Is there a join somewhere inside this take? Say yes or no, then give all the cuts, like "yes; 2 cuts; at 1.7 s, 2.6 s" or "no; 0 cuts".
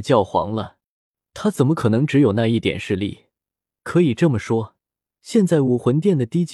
no; 0 cuts